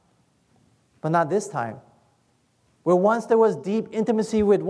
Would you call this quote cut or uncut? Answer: uncut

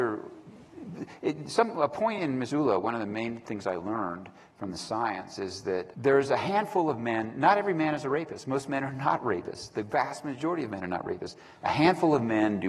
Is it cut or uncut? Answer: uncut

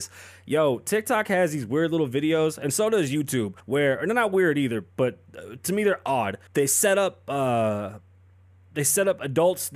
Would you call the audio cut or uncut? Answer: cut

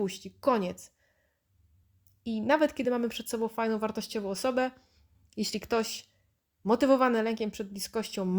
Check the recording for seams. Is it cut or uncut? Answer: uncut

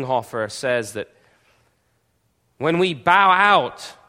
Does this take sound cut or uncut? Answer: uncut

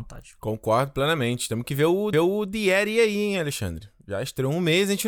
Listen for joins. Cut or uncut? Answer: cut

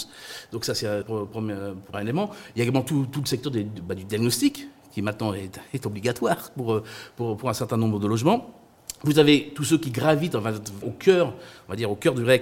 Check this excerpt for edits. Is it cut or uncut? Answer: cut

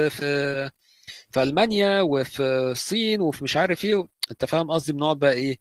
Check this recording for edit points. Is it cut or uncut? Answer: uncut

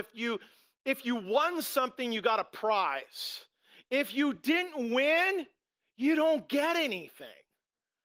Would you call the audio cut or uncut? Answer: uncut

